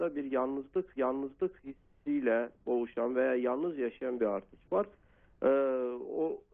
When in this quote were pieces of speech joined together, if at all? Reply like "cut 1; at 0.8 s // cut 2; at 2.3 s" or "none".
cut 1; at 1.0 s // cut 2; at 4.2 s